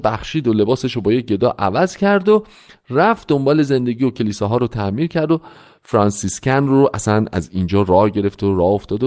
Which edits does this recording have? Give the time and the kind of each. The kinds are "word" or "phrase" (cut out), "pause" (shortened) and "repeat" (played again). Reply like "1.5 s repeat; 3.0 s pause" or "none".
none